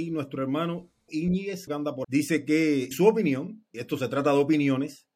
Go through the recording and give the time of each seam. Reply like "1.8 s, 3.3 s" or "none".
1.1 s, 1.7 s, 2.0 s, 2.9 s, 3.7 s

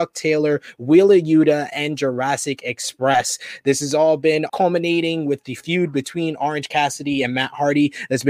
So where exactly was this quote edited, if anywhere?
4.5 s

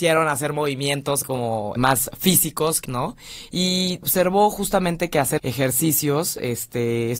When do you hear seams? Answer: 1.2 s, 1.8 s, 2.8 s, 4.0 s, 5.4 s

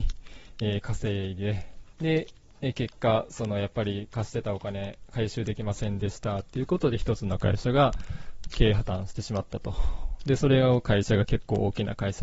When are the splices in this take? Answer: 1.9 s

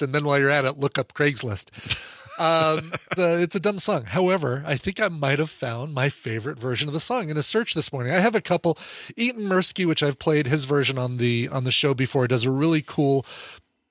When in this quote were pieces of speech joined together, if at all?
3.2 s

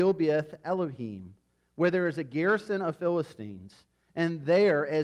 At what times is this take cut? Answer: none

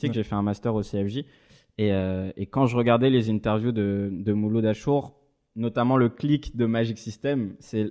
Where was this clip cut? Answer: none

